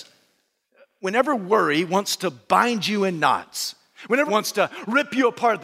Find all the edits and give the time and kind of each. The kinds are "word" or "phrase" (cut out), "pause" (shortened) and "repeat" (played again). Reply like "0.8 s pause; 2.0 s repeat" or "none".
4.3 s word